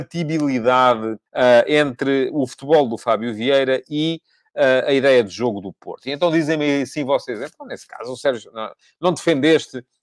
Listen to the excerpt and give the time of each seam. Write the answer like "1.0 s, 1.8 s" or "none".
1.3 s